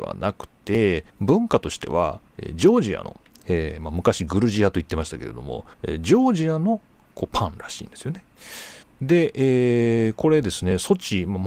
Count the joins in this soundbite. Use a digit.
5